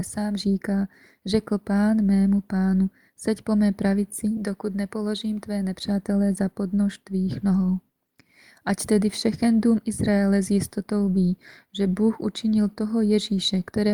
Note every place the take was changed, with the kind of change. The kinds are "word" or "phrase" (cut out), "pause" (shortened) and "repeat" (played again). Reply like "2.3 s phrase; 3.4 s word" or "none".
none